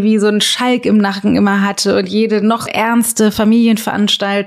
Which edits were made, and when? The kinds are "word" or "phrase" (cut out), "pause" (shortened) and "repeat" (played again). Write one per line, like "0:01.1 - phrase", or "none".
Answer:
0:02.7 - word